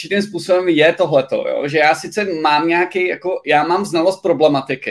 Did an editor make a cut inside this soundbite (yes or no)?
no